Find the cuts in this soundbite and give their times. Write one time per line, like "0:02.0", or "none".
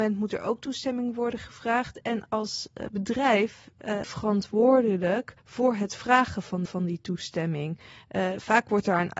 0:04.0
0:05.4
0:06.7